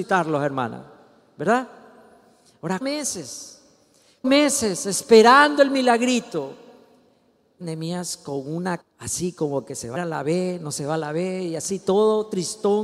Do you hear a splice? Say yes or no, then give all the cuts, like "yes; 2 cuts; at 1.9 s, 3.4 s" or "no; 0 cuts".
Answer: yes; 5 cuts; at 2.8 s, 4.2 s, 7.6 s, 8.8 s, 10.0 s